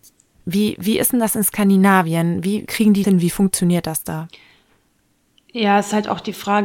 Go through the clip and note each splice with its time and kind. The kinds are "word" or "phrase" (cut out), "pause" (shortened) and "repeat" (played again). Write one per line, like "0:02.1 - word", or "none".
0:02.7 - word
0:03.0 - word